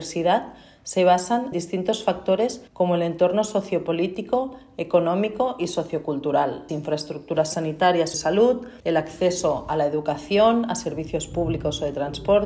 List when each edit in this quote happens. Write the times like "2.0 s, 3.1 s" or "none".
1.5 s, 2.7 s, 6.7 s, 8.1 s, 8.8 s